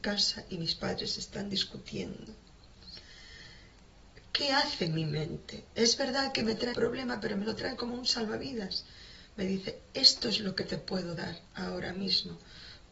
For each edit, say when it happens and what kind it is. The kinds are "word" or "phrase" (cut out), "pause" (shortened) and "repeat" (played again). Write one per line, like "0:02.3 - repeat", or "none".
0:06.7 - word